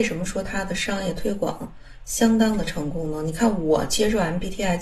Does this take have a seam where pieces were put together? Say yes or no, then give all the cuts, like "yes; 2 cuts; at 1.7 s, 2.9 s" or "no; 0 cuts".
no; 0 cuts